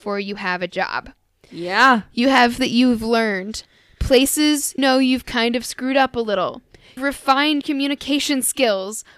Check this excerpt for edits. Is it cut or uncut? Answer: cut